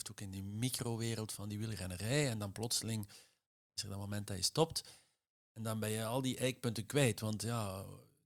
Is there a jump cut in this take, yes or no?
no